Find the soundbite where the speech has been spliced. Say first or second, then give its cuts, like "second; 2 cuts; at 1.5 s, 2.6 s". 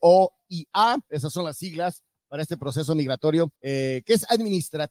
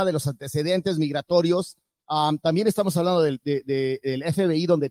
first; 1 cut; at 3.6 s